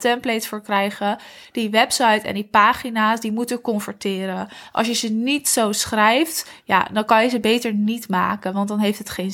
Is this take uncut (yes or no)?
yes